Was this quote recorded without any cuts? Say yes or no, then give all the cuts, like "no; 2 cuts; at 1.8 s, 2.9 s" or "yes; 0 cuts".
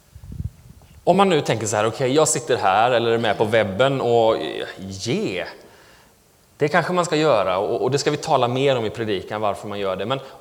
yes; 0 cuts